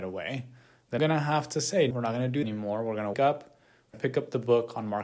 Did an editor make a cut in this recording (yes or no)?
yes